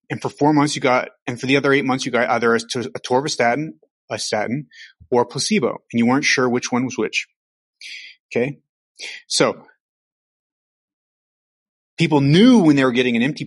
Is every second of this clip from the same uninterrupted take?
yes; 0 cuts

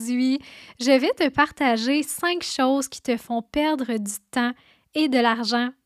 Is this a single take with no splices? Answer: yes; 0 cuts

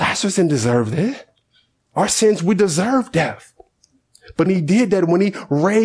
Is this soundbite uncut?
no; 2 cuts; at 1.5 s, 4.5 s

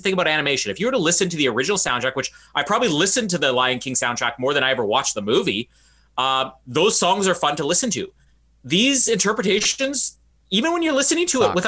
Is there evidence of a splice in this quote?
no; 0 cuts

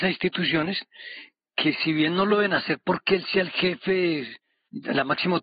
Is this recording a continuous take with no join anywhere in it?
yes; 0 cuts

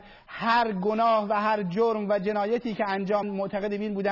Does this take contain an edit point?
yes; 1 cut; at 3.2 s

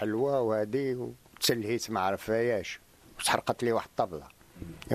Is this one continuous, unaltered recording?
yes; 0 cuts

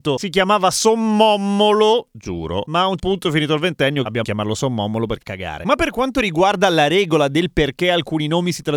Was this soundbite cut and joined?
yes; 3 cuts; at 3.0 s, 4.2 s, 5.2 s

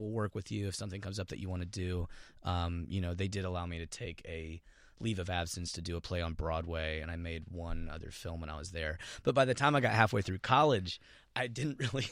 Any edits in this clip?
no; 0 cuts

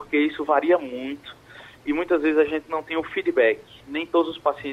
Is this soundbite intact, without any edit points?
yes; 0 cuts

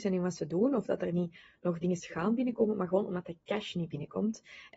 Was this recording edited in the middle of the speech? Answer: no; 0 cuts

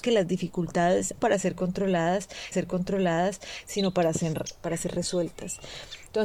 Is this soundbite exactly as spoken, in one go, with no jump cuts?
no; 2 cuts; at 1.2 s, 2.5 s

